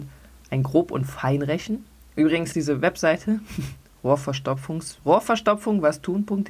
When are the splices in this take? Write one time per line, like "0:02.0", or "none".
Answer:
0:02.5
0:05.0